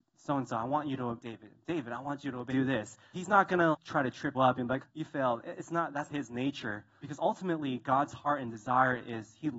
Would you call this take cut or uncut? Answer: cut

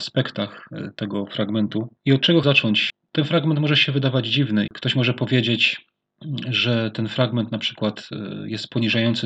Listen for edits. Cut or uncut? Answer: cut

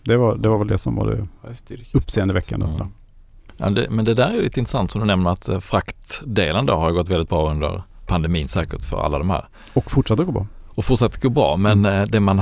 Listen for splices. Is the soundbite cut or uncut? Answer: uncut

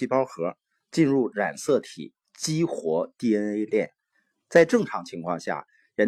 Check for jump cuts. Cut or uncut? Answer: uncut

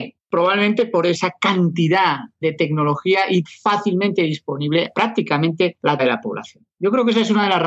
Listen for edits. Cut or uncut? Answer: cut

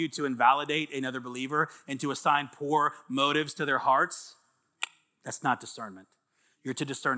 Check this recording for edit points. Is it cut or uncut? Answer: uncut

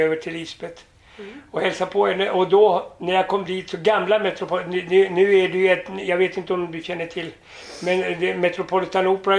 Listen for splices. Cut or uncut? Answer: uncut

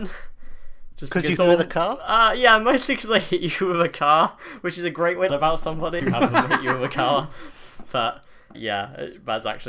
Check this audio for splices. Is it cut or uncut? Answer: cut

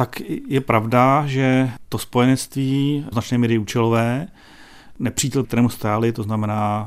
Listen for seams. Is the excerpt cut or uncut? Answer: cut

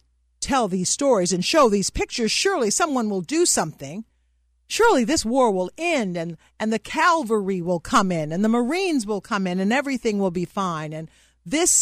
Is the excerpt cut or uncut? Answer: uncut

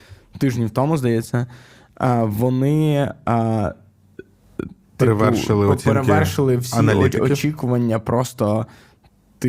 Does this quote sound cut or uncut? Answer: uncut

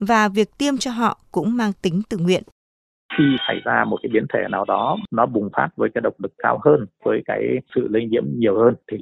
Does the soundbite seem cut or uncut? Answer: uncut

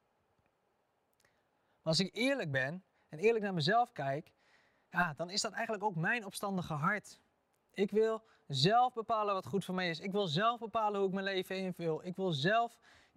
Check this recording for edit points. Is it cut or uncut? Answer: uncut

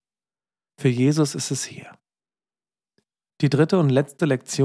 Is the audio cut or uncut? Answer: uncut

